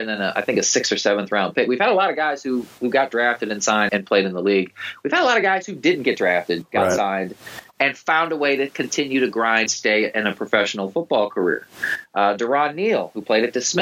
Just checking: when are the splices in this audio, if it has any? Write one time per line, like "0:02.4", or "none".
0:02.7
0:03.9
0:09.7